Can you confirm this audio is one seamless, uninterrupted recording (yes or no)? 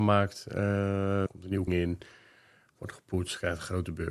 no